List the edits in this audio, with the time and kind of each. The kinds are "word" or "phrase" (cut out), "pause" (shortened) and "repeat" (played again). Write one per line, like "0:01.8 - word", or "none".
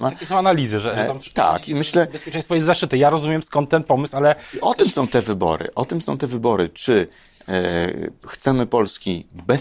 none